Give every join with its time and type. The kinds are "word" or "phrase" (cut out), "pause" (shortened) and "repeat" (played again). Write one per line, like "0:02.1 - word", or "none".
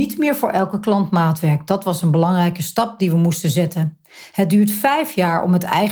none